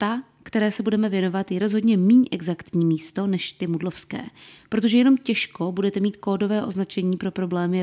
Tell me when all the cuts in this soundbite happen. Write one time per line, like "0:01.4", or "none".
none